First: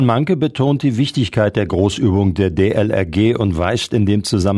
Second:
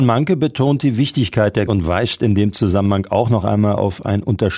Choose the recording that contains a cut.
second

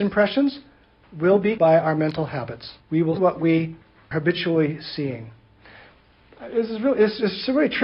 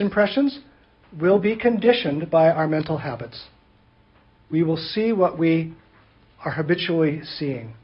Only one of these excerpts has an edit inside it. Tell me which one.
first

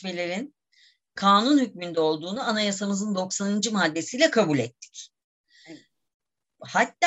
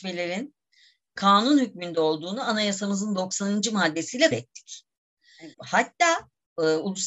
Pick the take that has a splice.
second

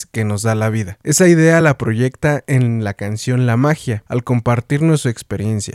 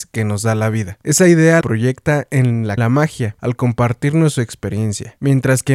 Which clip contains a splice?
second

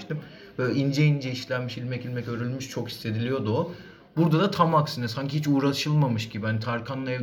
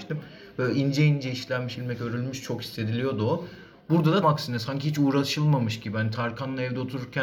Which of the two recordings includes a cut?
second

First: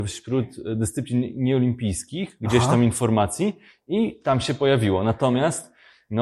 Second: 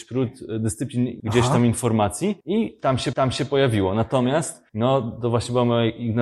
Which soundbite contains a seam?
second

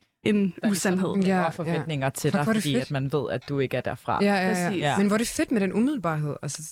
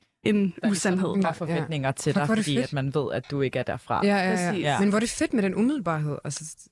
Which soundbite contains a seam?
second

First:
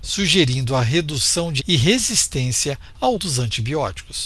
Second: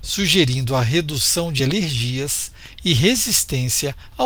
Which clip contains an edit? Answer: first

